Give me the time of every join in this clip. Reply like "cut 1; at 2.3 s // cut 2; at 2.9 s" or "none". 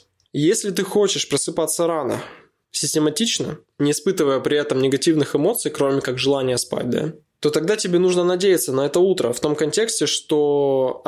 none